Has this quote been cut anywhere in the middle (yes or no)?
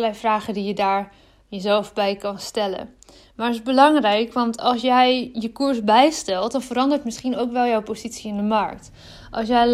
no